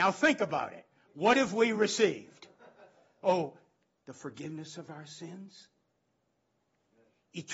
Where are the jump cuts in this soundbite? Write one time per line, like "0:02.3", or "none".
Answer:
none